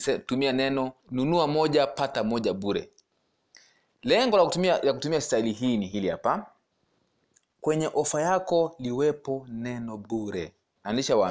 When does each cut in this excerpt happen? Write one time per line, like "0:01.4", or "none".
0:01.0